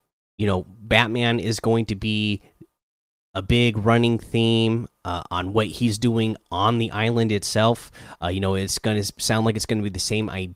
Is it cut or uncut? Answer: uncut